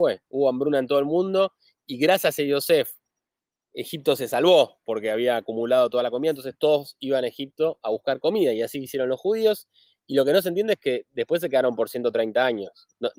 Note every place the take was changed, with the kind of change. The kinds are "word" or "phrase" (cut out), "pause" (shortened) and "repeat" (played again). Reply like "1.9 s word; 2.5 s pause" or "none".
none